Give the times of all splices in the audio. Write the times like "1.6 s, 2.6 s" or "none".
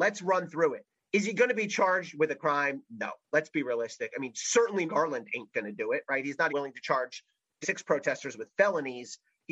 4.9 s, 6.5 s, 7.6 s